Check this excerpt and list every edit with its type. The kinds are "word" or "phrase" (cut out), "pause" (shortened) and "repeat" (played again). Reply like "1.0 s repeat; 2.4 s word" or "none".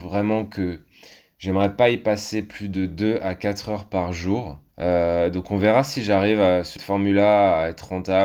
4.7 s pause; 6.8 s word